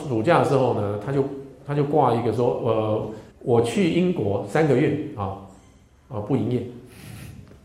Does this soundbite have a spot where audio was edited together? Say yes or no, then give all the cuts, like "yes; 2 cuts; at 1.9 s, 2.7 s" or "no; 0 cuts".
yes; 1 cut; at 3.3 s